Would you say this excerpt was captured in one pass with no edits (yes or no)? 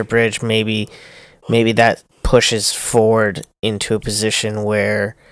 no